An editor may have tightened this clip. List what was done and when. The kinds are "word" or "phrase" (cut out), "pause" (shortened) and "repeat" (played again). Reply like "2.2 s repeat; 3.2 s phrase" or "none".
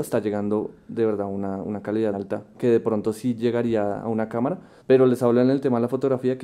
2.1 s word; 4.8 s pause